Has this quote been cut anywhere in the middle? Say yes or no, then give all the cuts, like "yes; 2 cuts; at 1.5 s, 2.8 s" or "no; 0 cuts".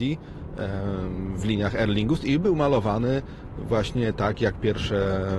no; 0 cuts